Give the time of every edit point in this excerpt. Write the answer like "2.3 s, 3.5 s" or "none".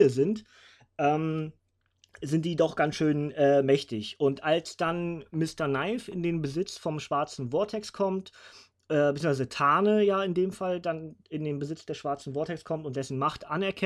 none